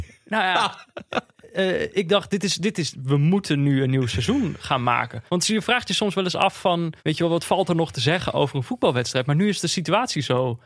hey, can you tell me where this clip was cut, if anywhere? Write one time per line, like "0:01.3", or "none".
0:05.3
0:07.0

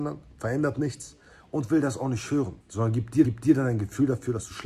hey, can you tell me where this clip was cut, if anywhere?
0:02.6
0:03.2

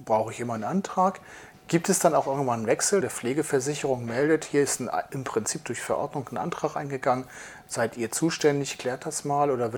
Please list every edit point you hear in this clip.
0:03.0

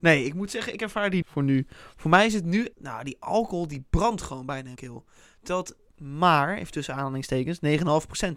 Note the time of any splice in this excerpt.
0:01.2
0:02.7
0:04.8

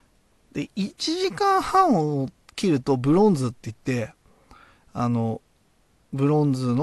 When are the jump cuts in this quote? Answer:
none

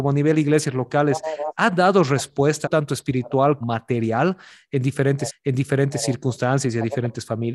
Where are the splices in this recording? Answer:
0:02.6
0:03.6
0:05.3

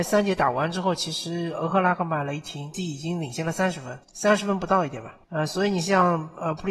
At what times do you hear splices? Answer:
0:02.7
0:04.0
0:05.2

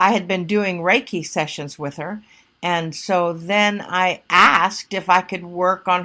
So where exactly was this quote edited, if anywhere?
none

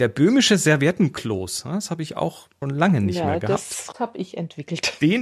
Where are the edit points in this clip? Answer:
0:02.6
0:03.9

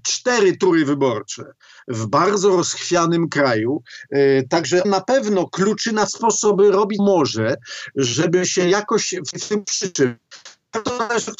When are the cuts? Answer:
0:04.8
0:06.1
0:07.0
0:09.3
0:09.6

